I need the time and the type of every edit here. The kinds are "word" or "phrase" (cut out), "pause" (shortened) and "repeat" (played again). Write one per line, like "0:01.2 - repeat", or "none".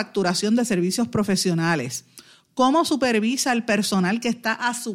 none